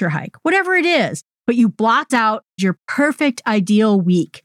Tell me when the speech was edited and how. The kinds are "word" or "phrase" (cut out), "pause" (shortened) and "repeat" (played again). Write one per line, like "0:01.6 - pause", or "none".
0:02.1 - word
0:02.6 - word